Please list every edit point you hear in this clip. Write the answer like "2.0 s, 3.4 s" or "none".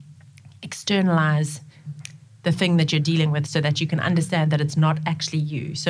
none